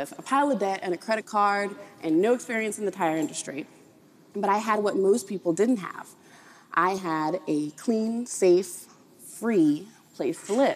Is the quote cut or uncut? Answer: uncut